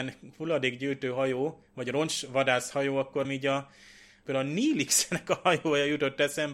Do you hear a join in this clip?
yes; 1 cut; at 3.2 s

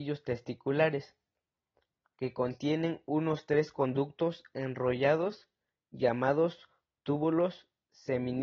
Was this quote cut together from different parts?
no; 0 cuts

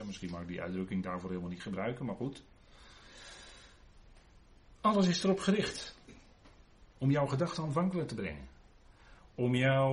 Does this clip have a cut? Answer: yes; 1 cut; at 6.9 s

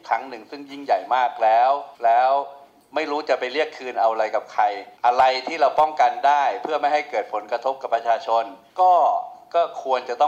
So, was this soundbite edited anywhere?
yes; 3 cuts; at 1.9 s, 5.0 s, 8.7 s

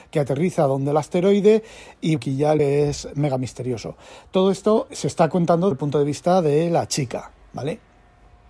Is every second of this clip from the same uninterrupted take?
no; 4 cuts; at 2.2 s, 2.6 s, 4.9 s, 5.7 s

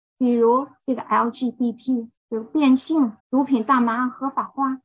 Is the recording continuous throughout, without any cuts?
no; 2 cuts; at 2.2 s, 3.2 s

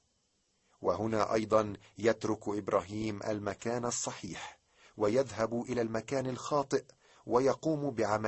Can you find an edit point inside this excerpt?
no; 0 cuts

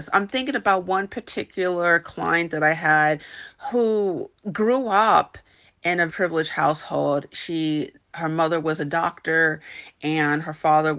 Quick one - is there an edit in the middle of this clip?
yes; 1 cut; at 6.1 s

